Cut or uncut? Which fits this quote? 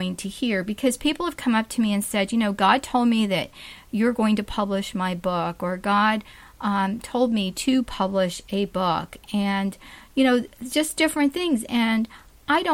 uncut